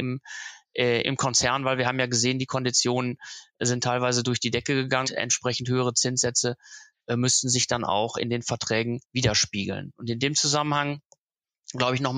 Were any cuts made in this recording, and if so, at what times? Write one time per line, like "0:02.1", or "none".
0:01.0
0:05.0
0:09.0